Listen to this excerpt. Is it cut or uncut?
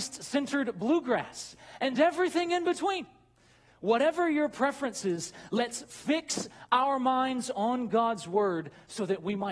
uncut